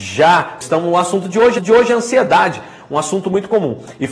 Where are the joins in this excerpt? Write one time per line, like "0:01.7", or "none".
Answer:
0:01.6